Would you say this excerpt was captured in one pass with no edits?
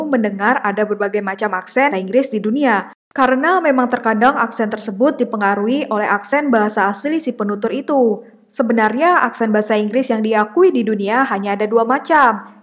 no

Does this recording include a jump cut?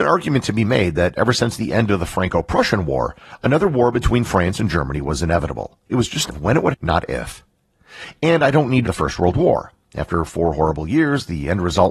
yes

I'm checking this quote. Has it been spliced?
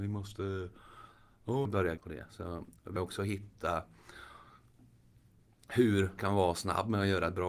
yes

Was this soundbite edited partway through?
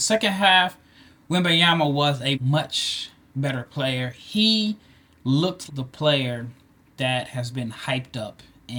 yes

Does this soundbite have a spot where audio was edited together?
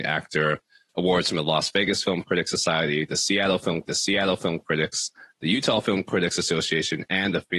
yes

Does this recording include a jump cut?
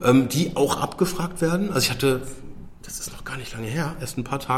no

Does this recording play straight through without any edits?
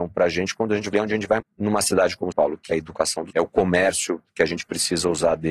no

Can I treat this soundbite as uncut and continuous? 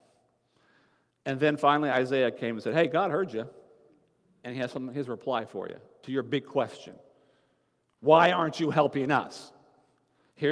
yes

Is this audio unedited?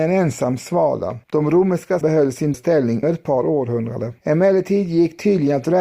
no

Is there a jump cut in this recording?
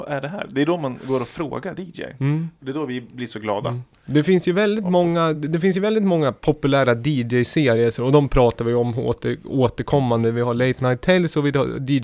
no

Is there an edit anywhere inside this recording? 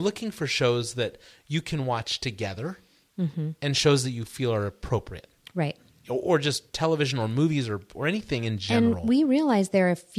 no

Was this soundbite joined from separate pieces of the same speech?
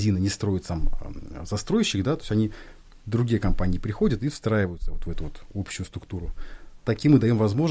no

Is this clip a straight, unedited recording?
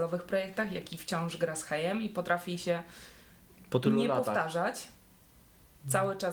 yes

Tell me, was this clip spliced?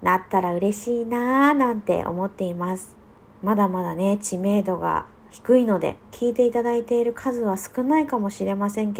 yes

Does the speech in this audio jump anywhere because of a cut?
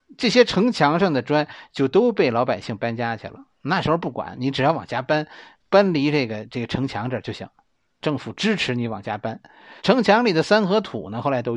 yes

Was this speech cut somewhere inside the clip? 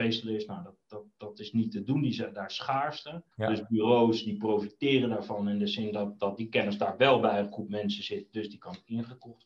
yes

